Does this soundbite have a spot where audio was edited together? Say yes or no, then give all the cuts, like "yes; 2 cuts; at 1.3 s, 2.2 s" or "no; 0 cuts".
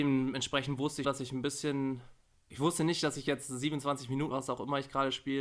yes; 3 cuts; at 1.0 s, 2.3 s, 4.3 s